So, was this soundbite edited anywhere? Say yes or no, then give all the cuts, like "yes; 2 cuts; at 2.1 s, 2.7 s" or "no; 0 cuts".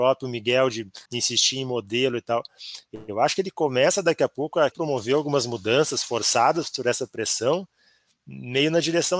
yes; 2 cuts; at 1.1 s, 4.7 s